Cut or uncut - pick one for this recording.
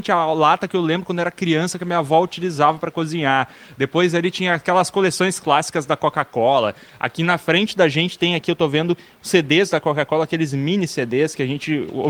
uncut